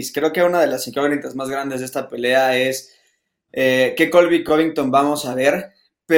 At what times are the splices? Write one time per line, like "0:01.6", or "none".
none